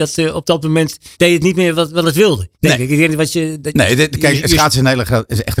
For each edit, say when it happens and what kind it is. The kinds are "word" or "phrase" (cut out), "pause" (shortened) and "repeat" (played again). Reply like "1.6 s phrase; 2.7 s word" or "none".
1.1 s pause; 2.5 s pause